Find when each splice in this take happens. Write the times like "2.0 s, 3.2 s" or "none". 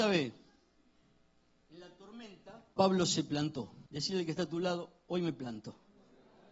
2.7 s, 3.9 s